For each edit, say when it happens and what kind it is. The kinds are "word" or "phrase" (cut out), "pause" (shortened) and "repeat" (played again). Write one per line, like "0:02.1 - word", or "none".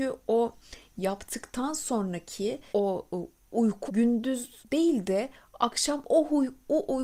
0:02.7 - word
0:03.9 - word